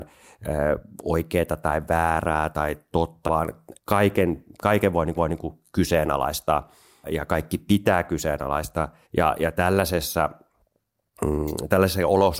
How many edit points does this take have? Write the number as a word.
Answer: six